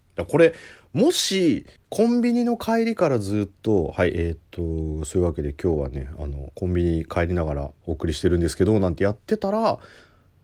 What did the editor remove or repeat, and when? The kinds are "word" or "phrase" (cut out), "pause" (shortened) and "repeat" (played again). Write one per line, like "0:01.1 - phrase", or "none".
0:01.8 - pause
0:07.8 - pause